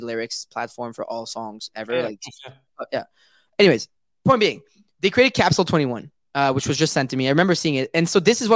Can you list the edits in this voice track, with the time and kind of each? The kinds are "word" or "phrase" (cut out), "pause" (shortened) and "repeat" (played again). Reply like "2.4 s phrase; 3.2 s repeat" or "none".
none